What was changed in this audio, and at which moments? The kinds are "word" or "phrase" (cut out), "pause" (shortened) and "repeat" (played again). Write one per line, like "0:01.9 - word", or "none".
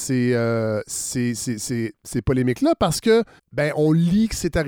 0:03.4 - pause